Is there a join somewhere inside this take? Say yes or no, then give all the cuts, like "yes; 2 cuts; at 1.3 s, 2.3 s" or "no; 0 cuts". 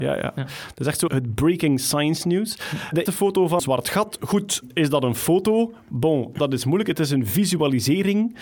yes; 3 cuts; at 1.1 s, 3.1 s, 3.6 s